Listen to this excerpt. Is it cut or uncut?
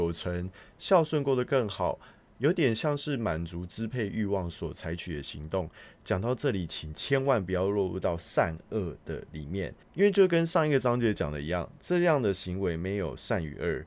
uncut